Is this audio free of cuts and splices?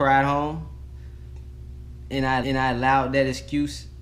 no; 1 cut; at 2.4 s

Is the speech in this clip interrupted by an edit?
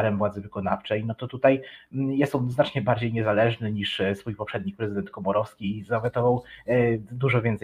no; 0 cuts

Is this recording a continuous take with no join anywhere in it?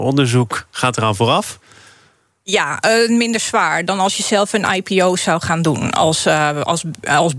yes; 0 cuts

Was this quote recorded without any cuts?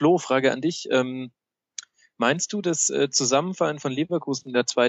yes; 0 cuts

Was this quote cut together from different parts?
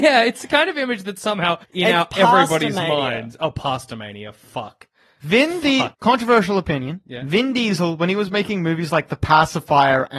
yes; 2 cuts; at 1.6 s, 5.9 s

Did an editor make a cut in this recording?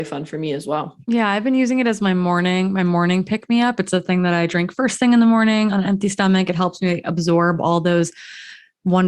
yes; 1 cut; at 1.0 s

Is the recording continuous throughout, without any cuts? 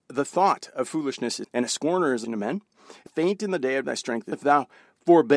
no; 5 cuts; at 1.4 s, 2.2 s, 3.1 s, 3.8 s, 4.3 s

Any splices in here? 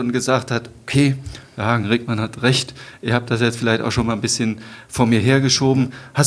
no; 0 cuts

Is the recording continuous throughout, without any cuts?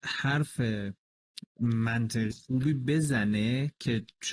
no; 1 cut; at 2.3 s

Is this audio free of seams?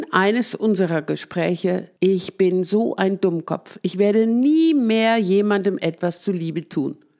no; 1 cut; at 2.0 s

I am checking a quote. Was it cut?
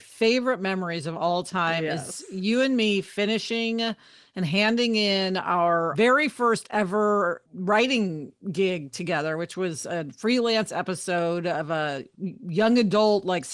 yes; 1 cut; at 7.5 s

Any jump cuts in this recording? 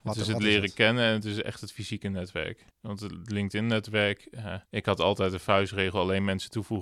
yes; 2 cuts; at 2.7 s, 4.6 s

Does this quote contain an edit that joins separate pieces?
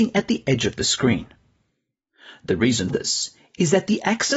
yes; 1 cut; at 2.9 s

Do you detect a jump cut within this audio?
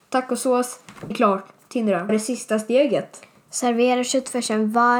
yes; 2 cuts; at 1.1 s, 2.1 s

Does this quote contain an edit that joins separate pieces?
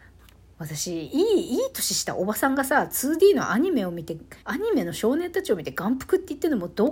yes; 1 cut; at 4.4 s

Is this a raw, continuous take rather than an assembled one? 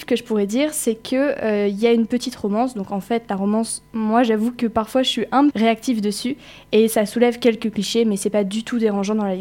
no; 1 cut; at 5.5 s

